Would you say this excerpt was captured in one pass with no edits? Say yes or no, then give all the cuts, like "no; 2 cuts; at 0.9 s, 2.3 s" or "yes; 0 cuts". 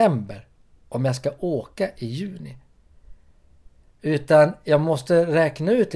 yes; 0 cuts